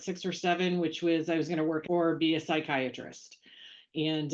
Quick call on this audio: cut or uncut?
cut